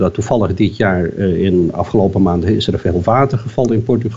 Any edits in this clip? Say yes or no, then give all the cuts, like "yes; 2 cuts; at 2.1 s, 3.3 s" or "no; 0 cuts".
no; 0 cuts